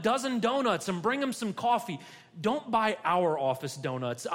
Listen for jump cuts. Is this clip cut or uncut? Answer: uncut